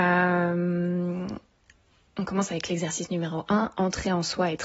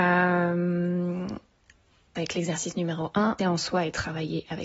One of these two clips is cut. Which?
second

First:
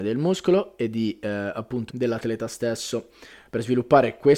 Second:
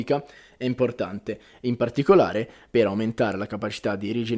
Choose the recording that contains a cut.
first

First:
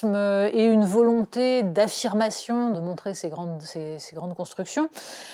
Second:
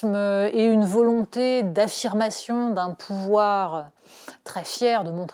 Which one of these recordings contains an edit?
first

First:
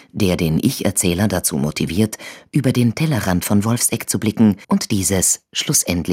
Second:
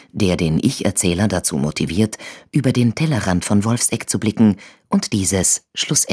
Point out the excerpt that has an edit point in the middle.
first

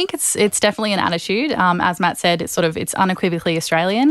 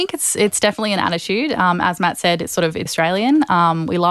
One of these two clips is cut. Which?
second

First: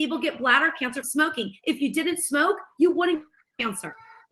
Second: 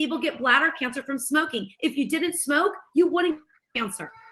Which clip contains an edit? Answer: first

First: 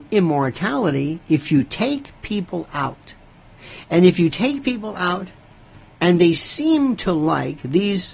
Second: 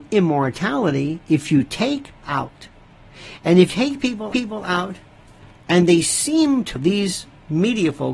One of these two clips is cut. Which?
second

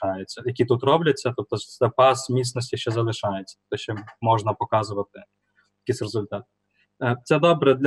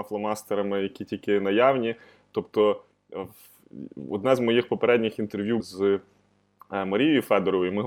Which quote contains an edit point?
second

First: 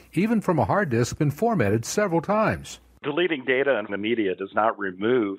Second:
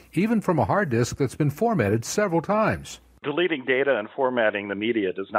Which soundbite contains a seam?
first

